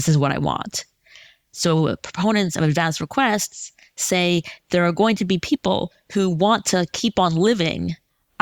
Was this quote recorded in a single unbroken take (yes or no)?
yes